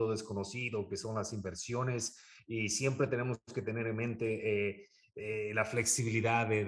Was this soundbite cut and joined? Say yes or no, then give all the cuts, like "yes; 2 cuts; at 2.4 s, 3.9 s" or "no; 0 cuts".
no; 0 cuts